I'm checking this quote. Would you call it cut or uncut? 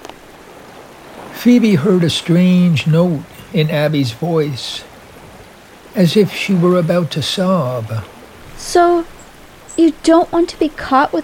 cut